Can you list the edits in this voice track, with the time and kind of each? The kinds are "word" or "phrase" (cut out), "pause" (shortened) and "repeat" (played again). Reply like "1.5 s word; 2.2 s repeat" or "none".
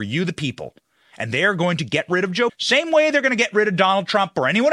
2.5 s word